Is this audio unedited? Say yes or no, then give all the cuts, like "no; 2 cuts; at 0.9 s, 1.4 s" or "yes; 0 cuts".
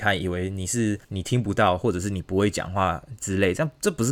no; 1 cut; at 1.0 s